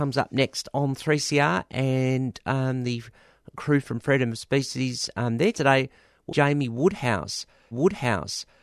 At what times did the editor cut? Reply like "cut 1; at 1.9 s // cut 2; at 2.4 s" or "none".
cut 1; at 5.5 s // cut 2; at 6.3 s // cut 3; at 7.7 s